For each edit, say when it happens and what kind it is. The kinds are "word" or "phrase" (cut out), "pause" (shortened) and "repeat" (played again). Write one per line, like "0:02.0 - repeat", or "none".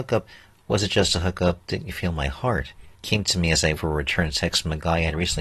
0:02.9 - pause
0:03.8 - word